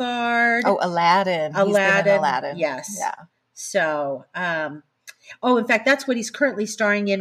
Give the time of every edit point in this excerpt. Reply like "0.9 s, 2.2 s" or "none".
none